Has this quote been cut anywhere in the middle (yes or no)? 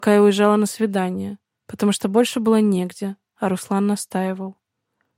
yes